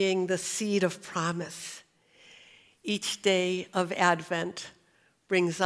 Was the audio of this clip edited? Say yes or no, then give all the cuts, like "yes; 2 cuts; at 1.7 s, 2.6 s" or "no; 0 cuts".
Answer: no; 0 cuts